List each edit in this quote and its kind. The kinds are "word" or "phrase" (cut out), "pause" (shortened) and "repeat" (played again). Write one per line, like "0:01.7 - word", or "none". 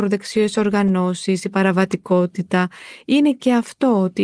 none